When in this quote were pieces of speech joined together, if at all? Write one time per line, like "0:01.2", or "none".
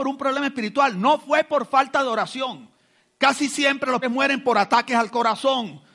0:04.0